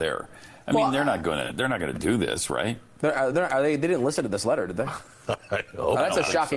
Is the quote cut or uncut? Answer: uncut